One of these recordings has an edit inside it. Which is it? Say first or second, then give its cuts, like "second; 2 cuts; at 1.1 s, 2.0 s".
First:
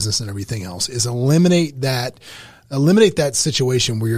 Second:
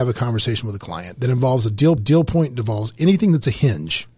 second; 1 cut; at 2.0 s